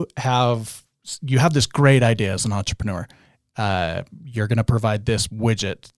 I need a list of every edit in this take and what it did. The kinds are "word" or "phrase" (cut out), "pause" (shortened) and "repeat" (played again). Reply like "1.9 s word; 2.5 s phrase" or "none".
none